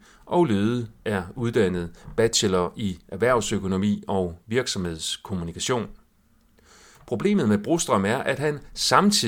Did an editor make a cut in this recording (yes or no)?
no